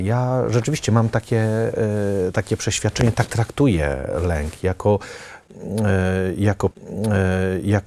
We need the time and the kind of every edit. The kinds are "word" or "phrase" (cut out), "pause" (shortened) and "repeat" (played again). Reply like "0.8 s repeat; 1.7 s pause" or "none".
6.7 s repeat